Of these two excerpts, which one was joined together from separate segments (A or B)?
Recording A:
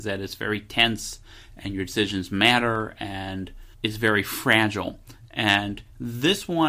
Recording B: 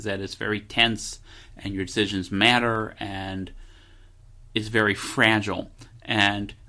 A